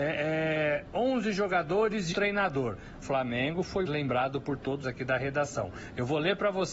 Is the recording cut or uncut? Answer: cut